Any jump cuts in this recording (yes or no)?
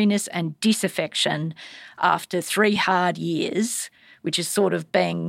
no